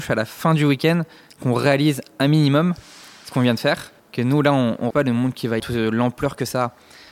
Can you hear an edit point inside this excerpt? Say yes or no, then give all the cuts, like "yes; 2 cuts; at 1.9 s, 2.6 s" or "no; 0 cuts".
yes; 3 cuts; at 4.0 s, 4.9 s, 5.6 s